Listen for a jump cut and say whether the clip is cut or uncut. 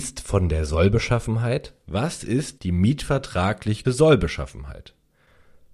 cut